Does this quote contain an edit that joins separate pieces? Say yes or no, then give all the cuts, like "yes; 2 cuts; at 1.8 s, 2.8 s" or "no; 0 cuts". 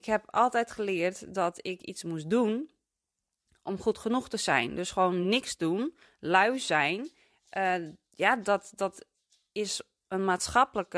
no; 0 cuts